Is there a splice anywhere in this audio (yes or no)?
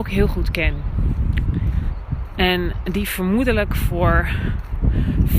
no